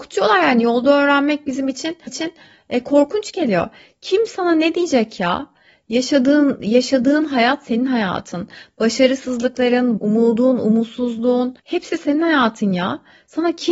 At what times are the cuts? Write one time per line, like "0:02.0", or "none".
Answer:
0:02.1
0:10.0
0:11.6